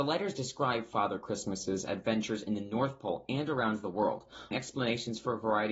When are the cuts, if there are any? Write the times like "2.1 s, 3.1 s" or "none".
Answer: 4.5 s